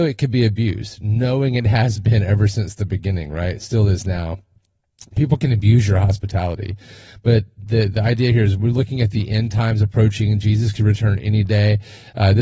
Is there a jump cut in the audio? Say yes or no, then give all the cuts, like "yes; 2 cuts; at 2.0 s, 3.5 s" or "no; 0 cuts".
no; 0 cuts